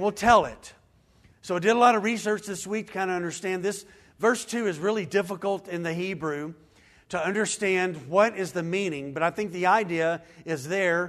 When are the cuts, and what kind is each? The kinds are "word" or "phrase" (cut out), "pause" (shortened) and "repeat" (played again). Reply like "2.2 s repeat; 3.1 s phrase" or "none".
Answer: none

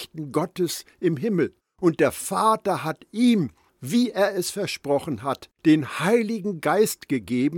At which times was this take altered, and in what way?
1.6 s pause; 5.5 s pause

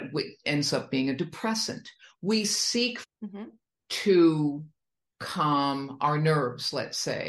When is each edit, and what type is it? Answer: 3.0 s phrase

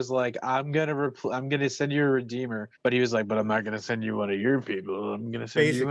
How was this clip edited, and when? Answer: 2.7 s pause

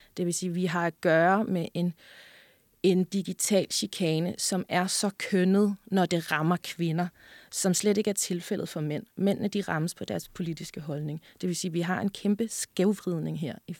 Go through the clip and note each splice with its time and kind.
none

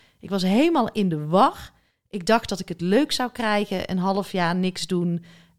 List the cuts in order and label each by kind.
none

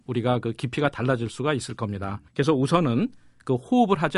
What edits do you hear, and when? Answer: 2.3 s pause

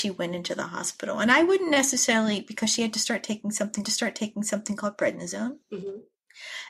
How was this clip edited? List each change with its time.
3.8 s repeat; 5.6 s pause

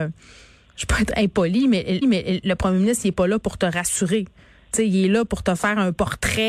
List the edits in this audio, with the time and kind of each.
2.0 s repeat

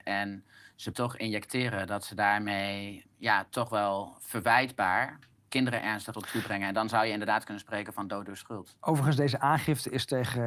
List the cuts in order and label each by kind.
0.9 s word; 3.0 s word; 5.4 s word; 6.1 s word

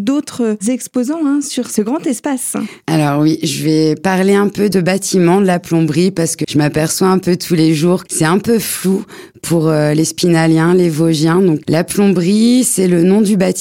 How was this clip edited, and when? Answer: 4.7 s word; 6.4 s word; 8.1 s word; 11.6 s word

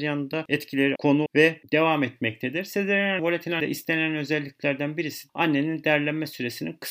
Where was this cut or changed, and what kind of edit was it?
1.0 s word; 1.3 s word; 3.2 s phrase; 3.6 s word; 5.3 s word

